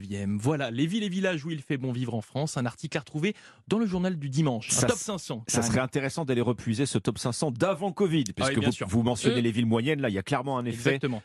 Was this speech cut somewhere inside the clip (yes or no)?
no